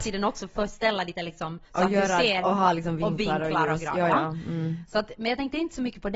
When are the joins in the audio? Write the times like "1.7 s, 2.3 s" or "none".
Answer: 1.1 s, 1.7 s, 2.4 s